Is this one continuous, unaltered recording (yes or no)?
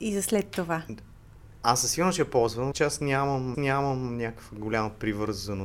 no